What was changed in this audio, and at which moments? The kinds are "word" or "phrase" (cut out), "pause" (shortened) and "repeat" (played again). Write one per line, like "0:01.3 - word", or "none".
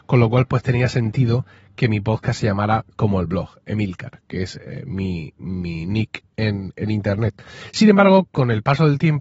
none